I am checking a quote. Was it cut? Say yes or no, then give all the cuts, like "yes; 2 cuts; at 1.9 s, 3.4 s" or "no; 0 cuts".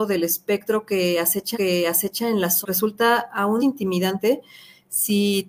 yes; 3 cuts; at 1.5 s, 2.6 s, 3.6 s